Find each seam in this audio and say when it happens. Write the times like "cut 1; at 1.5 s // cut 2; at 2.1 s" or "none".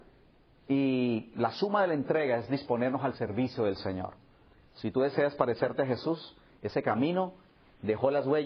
none